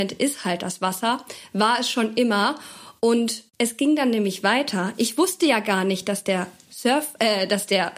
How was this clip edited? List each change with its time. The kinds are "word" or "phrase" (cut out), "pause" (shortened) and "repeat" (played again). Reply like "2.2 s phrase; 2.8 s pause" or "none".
3.5 s pause